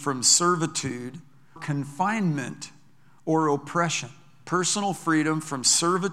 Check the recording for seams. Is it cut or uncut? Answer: cut